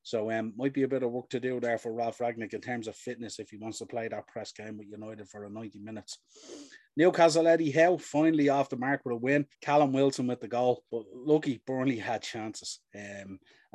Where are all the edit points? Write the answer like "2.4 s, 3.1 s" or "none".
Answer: 9.5 s, 10.9 s